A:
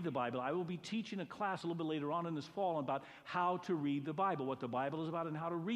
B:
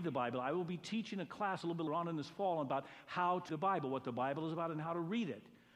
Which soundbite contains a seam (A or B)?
B